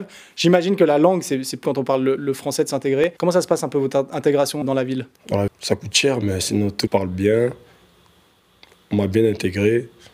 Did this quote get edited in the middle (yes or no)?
yes